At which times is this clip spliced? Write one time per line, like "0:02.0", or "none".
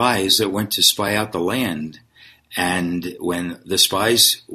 none